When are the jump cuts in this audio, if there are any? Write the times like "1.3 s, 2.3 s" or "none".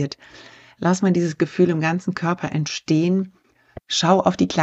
none